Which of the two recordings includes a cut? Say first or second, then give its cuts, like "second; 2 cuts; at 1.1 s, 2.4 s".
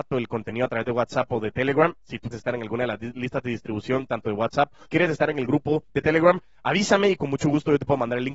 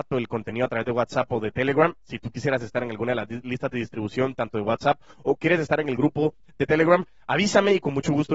first; 3 cuts; at 2.3 s, 4.9 s, 5.9 s